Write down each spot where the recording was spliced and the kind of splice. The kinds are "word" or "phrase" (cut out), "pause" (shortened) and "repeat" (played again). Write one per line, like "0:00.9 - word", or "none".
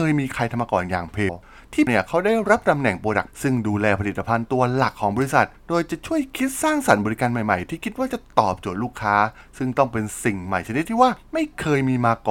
0:01.3 - phrase
0:01.9 - word
0:03.3 - word